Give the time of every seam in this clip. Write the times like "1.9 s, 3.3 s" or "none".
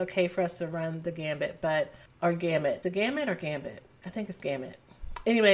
2.8 s